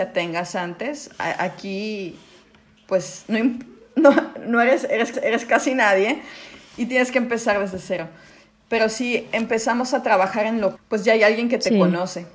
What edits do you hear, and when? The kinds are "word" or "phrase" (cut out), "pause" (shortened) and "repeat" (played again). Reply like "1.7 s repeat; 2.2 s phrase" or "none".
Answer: 5.1 s repeat; 10.7 s phrase